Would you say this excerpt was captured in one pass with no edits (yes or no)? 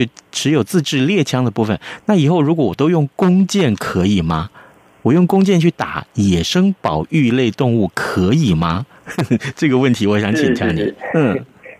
yes